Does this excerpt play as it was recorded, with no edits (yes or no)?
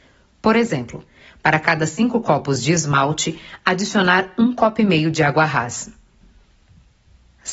yes